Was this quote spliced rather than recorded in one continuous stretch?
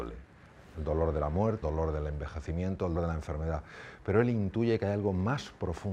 yes; 2 cuts; at 1.6 s, 2.9 s

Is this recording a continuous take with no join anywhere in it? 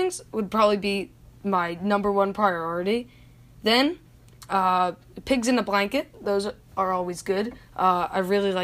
yes; 0 cuts

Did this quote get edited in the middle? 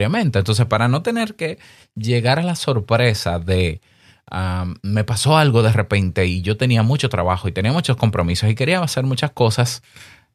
no; 0 cuts

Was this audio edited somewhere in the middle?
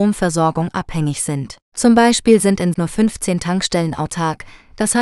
yes; 2 cuts; at 1.6 s, 2.7 s

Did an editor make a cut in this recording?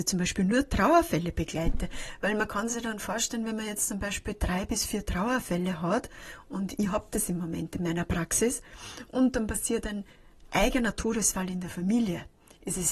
no; 0 cuts

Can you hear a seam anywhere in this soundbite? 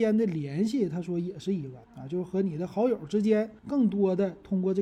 yes; 2 cuts; at 1.8 s, 3.6 s

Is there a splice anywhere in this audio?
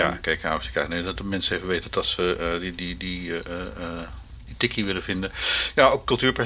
no; 0 cuts

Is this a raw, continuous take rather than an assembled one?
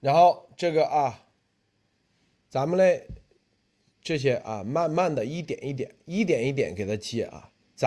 no; 1 cut; at 3.7 s

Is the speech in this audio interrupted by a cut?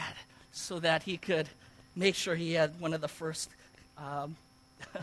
no; 0 cuts

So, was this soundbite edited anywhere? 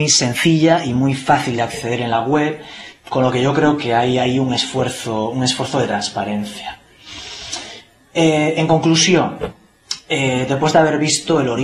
no; 0 cuts

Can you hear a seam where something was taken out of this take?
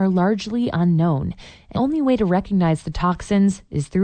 yes; 1 cut; at 1.7 s

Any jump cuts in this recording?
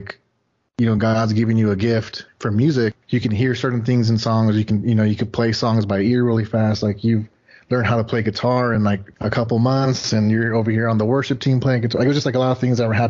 no; 0 cuts

